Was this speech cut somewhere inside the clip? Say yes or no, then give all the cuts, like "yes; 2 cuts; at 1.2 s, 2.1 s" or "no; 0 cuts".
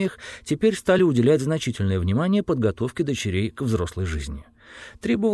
no; 0 cuts